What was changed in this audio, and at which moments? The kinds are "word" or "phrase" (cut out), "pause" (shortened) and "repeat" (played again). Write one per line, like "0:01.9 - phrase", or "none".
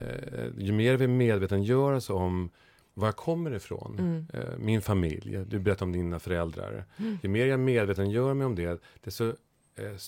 0:02.9 - word

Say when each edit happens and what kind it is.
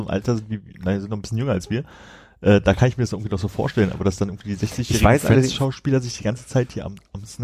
none

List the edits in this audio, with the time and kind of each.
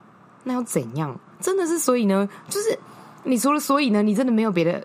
0:01.3 - pause

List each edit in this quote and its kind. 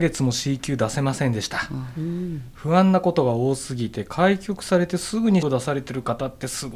0:05.4 - word

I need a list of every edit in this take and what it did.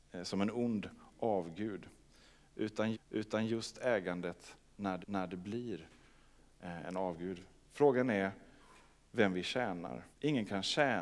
0:02.9 - repeat
0:05.0 - repeat
0:10.1 - pause

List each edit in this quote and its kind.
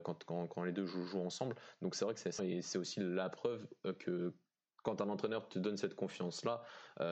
0:02.4 - word

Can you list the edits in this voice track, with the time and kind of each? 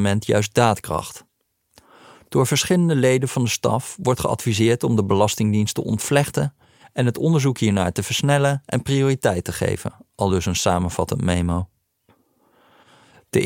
none

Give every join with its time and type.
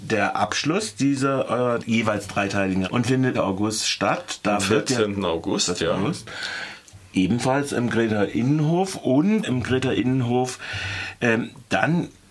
0:01.8 - word
0:02.9 - word
0:03.3 - word
0:09.4 - word

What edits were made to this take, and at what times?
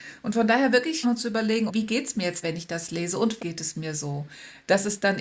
0:01.0 - word
0:01.7 - word
0:02.4 - word
0:03.4 - word

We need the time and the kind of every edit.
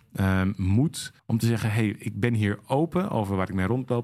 0:01.2 - pause

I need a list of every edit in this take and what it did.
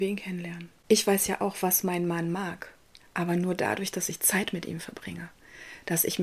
0:03.0 - pause

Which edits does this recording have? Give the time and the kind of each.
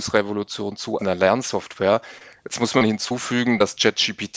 0:01.0 - word

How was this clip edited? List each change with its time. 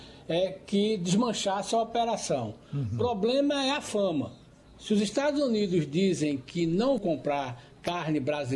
0:07.0 - word

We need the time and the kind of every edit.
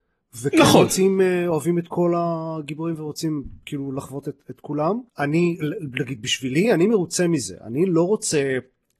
0:05.1 - pause

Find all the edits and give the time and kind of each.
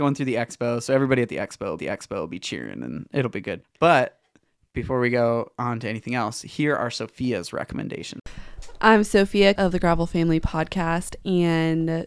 0:01.8 - repeat
0:03.6 - pause
0:09.6 - phrase

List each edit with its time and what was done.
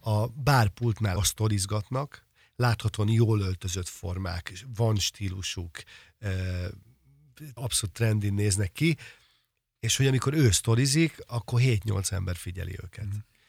0:01.2 - word
0:07.6 - word

